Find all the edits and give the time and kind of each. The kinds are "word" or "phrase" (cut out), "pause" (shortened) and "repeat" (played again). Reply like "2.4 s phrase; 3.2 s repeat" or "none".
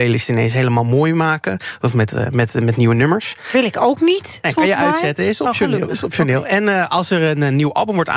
none